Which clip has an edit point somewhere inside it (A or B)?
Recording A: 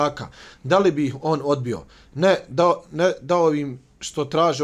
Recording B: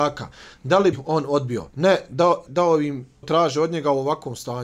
B